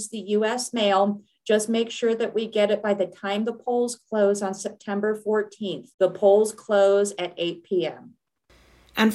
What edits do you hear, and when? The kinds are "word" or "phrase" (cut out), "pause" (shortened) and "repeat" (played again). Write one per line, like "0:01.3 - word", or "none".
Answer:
0:05.9 - pause